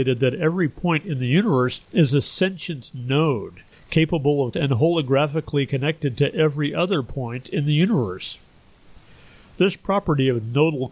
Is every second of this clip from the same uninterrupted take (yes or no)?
no